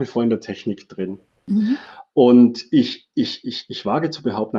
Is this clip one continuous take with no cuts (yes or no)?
yes